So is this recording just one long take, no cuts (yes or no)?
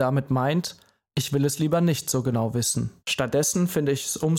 no